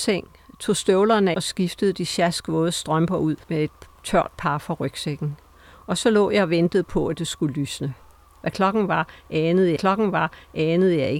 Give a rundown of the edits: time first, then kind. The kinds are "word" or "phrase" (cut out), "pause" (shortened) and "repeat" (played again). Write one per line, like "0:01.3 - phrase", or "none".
0:01.3 - word
0:03.4 - pause
0:09.8 - repeat